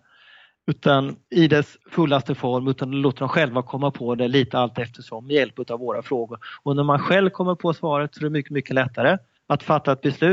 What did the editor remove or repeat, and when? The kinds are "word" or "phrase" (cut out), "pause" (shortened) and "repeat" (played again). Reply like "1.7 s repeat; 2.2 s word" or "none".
1.2 s pause; 1.8 s pause; 9.4 s pause